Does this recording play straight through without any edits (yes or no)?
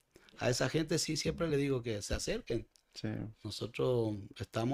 yes